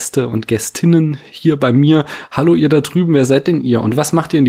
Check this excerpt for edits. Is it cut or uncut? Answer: uncut